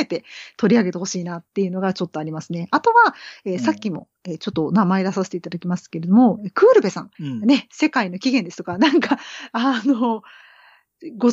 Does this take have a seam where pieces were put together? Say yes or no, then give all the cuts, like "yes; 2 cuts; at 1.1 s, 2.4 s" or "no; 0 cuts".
yes; 2 cuts; at 1.5 s, 7.1 s